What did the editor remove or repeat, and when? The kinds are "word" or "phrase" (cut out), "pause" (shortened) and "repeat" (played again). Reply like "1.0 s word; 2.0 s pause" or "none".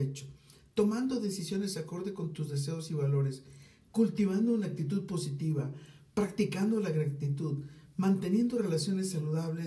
none